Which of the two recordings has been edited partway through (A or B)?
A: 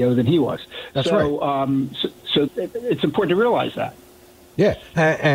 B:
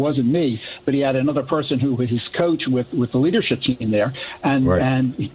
A